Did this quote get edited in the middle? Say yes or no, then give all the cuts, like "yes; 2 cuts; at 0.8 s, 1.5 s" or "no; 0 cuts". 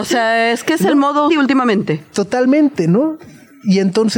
yes; 1 cut; at 1.3 s